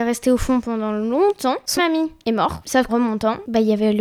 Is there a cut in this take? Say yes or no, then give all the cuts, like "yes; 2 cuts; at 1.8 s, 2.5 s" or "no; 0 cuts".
yes; 2 cuts; at 1.8 s, 2.9 s